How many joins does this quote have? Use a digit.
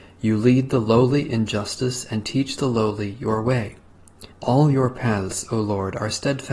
1